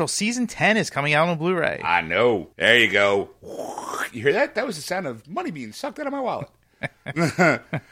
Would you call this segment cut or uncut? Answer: cut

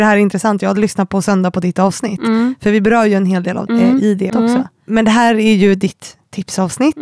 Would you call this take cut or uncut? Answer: cut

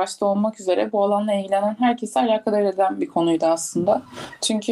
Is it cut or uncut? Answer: uncut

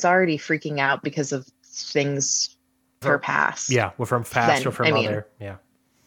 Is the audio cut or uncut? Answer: cut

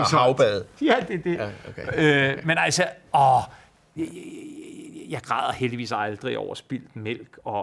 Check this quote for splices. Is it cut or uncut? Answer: uncut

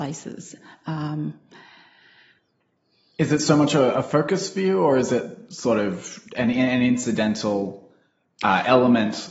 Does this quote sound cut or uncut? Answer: uncut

